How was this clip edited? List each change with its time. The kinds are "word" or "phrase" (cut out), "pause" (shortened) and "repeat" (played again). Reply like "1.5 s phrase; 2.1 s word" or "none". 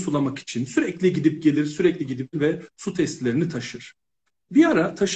2.3 s word